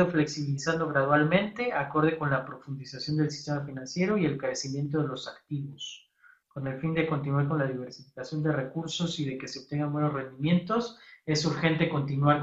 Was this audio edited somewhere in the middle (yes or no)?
no